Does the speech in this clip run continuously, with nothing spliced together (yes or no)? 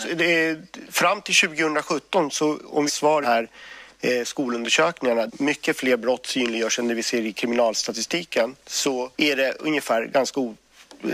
no